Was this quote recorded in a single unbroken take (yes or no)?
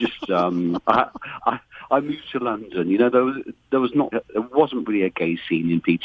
no